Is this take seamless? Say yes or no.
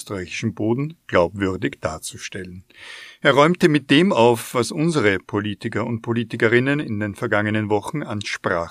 yes